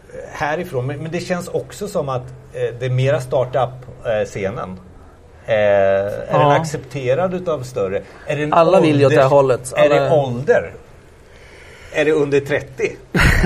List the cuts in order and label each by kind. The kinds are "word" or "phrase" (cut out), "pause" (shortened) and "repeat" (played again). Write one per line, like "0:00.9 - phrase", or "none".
none